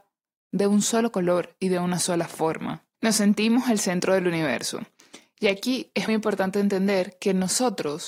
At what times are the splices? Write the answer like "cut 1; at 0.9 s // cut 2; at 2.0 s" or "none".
cut 1; at 2.9 s // cut 2; at 6.1 s